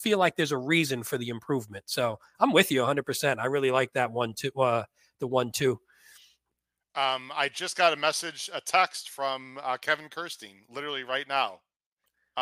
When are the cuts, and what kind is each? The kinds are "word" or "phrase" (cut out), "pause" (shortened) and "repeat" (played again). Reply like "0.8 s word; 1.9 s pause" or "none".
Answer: none

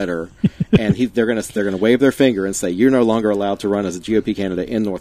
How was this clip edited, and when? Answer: none

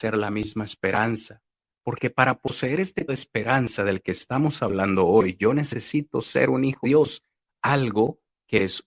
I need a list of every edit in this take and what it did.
3.1 s word; 6.8 s word

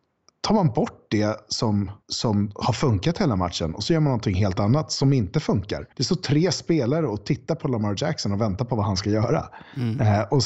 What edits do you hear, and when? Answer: 2.0 s pause; 5.9 s pause

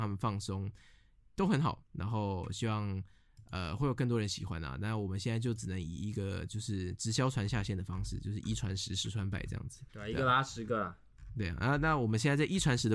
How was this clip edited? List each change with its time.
9.9 s pause

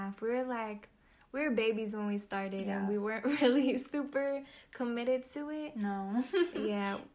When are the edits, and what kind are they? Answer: none

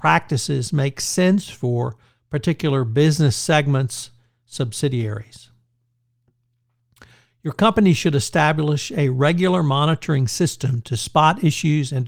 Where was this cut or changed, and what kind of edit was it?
none

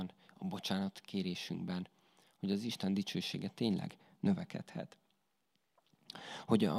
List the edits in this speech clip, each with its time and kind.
none

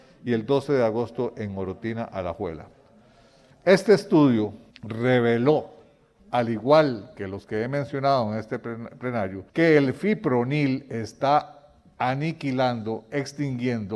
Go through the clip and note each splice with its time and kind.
4.7 s pause; 9.5 s pause

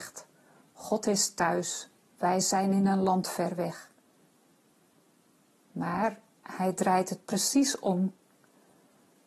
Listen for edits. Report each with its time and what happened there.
none

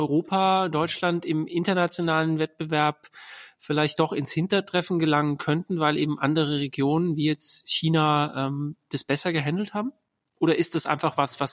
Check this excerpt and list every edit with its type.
none

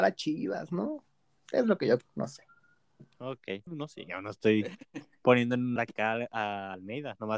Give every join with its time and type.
2.0 s word; 3.7 s word; 5.8 s word

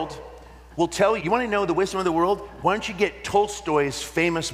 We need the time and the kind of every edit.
1.2 s word

